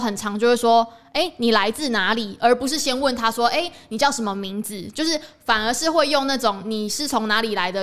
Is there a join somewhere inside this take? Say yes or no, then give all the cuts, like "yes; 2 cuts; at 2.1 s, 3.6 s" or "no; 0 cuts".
no; 0 cuts